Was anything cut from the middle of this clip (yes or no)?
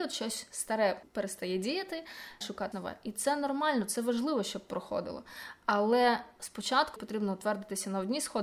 yes